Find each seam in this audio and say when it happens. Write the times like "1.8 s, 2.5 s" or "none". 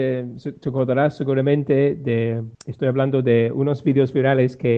2.5 s